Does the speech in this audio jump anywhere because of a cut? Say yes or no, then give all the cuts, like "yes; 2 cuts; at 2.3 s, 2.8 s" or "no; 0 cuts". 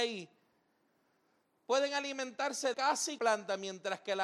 yes; 2 cuts; at 2.7 s, 3.2 s